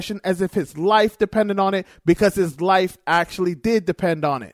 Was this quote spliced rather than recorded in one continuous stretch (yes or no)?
no